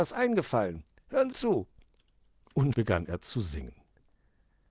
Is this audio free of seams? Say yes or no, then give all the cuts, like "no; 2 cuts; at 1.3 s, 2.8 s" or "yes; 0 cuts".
no; 2 cuts; at 1.3 s, 2.7 s